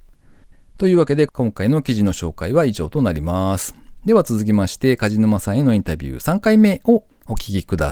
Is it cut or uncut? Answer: uncut